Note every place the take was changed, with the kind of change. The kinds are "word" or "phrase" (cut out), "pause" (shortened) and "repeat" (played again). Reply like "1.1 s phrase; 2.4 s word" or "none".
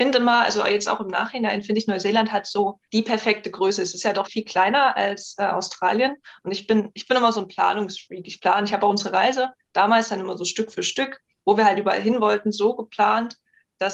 2.9 s pause; 4.3 s word